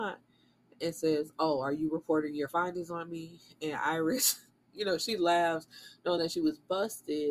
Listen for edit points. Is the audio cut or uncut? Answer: uncut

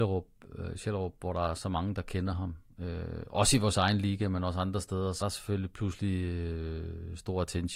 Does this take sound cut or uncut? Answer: cut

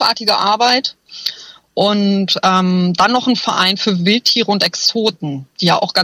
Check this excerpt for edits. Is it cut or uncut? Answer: uncut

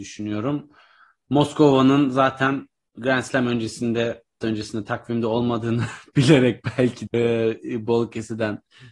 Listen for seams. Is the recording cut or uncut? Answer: cut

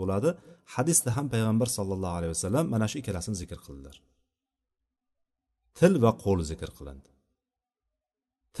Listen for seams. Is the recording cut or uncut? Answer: uncut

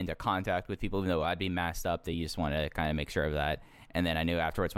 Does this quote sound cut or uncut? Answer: uncut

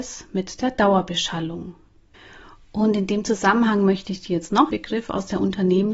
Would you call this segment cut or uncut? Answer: cut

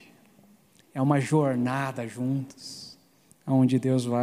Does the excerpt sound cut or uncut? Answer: uncut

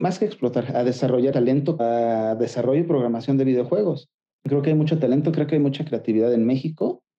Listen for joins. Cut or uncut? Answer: cut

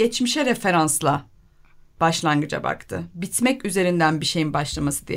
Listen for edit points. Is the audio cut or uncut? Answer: uncut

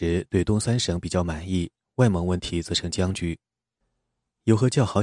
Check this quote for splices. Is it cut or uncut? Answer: uncut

